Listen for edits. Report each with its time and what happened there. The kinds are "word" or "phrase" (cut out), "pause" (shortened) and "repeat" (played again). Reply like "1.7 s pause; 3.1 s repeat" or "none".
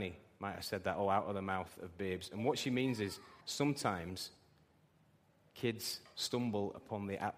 3.4 s pause